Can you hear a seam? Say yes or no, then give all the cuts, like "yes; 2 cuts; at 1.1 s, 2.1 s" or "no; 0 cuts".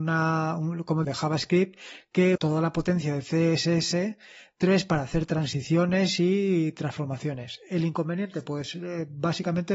yes; 2 cuts; at 1.0 s, 2.3 s